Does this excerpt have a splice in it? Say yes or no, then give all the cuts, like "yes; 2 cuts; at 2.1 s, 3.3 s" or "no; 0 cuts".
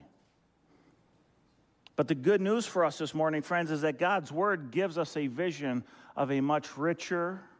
no; 0 cuts